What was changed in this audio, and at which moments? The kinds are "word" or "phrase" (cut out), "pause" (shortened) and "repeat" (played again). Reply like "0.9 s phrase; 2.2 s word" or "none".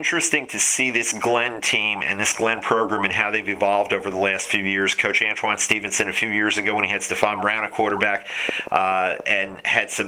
none